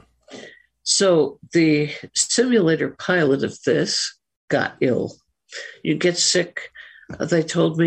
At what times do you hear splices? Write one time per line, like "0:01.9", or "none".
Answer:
none